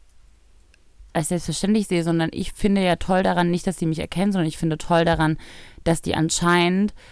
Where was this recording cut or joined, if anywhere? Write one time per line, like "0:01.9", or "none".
0:01.1